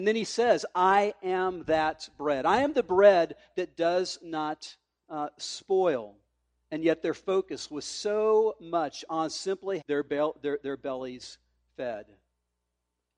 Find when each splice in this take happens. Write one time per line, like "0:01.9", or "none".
0:09.8